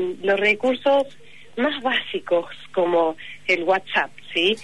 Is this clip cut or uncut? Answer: uncut